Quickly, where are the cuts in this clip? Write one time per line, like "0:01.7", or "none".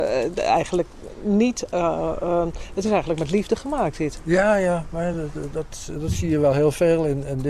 none